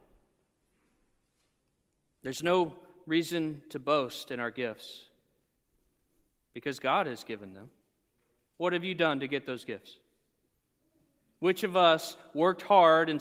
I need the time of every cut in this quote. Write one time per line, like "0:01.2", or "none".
none